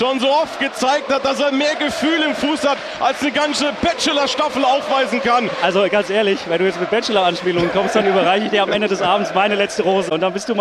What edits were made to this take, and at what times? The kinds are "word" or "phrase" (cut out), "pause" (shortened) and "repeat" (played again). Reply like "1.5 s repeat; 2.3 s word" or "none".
none